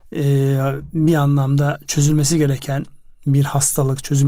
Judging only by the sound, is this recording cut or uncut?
uncut